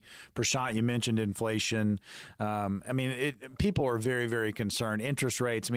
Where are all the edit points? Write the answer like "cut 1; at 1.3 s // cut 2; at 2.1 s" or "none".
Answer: none